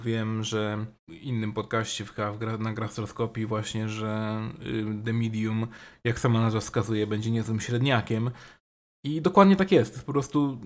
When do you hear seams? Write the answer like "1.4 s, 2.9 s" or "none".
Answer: none